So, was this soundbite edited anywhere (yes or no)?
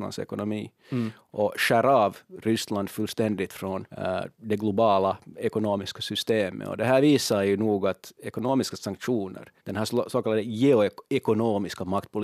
yes